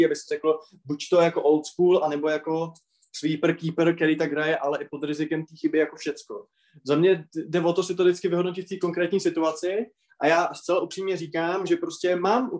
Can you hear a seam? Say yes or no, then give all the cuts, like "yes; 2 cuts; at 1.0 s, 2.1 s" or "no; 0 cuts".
no; 0 cuts